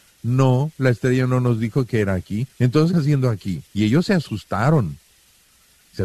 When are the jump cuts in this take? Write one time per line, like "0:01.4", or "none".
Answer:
0:02.5
0:02.9
0:03.7